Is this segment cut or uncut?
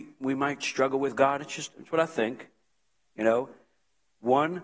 uncut